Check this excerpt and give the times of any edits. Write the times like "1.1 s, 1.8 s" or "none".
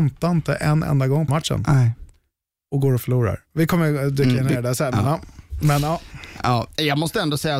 1.3 s